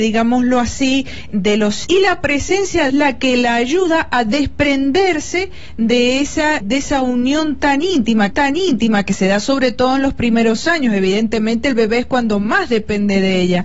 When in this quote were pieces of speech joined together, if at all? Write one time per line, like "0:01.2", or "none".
0:01.3
0:01.8
0:02.9
0:06.6
0:08.3